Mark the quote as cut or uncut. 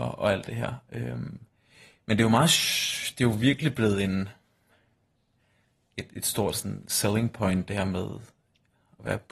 uncut